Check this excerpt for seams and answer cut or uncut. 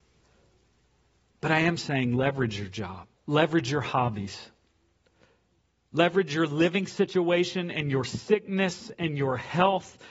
cut